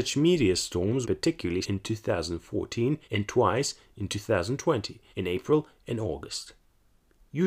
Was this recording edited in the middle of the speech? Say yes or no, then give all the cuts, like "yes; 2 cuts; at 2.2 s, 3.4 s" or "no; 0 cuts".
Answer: yes; 4 cuts; at 1.0 s, 1.6 s, 3.0 s, 5.1 s